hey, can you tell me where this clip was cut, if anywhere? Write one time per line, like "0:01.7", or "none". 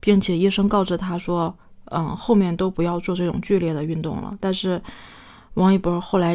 none